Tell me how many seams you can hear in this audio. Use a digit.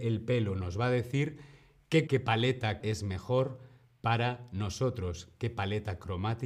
2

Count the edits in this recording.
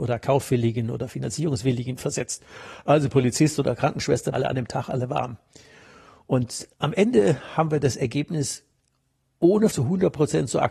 3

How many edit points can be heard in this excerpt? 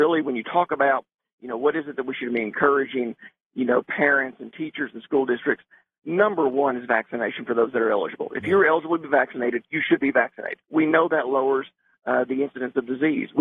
1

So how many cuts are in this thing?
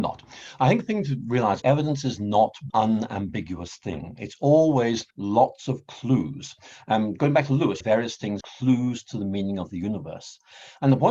5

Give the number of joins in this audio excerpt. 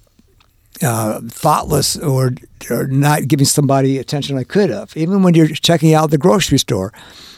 0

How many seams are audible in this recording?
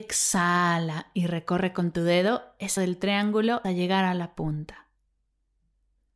2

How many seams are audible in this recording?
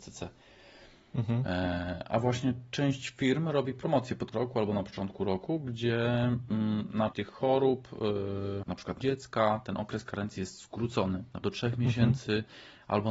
5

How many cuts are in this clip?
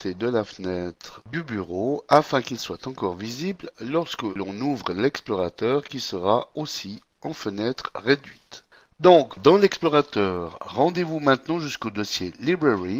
1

